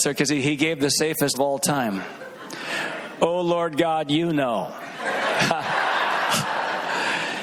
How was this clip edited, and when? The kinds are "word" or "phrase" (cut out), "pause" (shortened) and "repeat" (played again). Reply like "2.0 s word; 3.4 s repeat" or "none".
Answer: 1.3 s word